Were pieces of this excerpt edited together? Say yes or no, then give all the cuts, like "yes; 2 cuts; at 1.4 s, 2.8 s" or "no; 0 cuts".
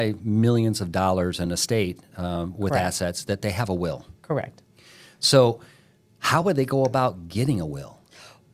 no; 0 cuts